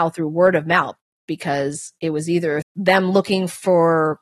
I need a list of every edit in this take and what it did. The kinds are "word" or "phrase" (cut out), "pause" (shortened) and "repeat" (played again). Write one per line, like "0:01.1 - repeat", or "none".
0:02.6 - word